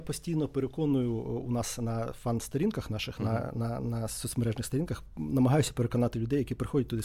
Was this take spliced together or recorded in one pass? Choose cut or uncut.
uncut